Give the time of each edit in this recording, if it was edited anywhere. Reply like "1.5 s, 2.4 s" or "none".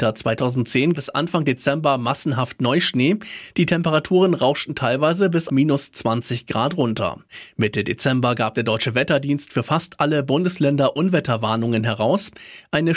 0.9 s, 5.5 s